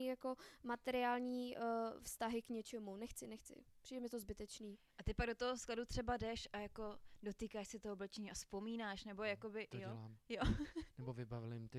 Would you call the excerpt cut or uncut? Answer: uncut